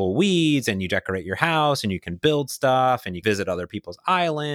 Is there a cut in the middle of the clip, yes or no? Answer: yes